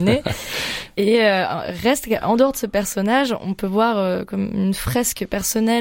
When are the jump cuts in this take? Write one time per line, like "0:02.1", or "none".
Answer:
none